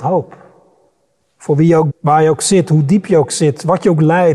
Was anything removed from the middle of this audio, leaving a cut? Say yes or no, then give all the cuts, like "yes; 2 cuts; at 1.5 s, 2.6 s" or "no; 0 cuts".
yes; 1 cut; at 1.9 s